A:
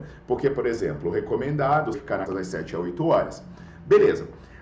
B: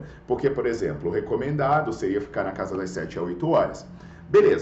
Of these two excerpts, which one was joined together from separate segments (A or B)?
A